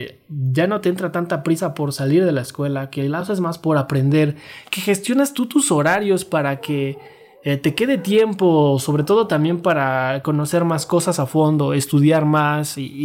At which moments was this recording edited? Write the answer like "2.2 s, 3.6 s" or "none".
none